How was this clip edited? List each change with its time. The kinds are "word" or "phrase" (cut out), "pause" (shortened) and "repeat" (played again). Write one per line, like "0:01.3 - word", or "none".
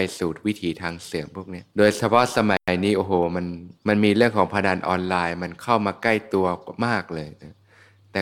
0:01.7 - pause
0:03.8 - pause